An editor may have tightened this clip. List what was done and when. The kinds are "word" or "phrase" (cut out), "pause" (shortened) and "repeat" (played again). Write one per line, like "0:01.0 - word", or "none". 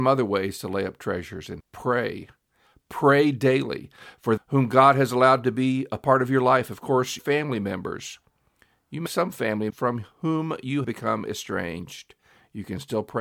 0:01.6 - word
0:04.4 - word
0:07.2 - word
0:09.1 - word
0:09.7 - word
0:10.8 - word